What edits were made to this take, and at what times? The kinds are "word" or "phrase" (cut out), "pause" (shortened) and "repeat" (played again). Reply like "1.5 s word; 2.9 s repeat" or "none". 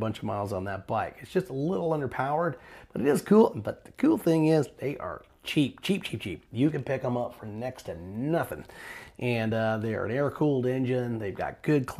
none